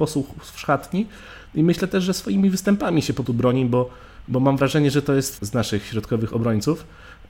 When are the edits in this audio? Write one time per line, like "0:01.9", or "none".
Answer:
0:03.3
0:05.4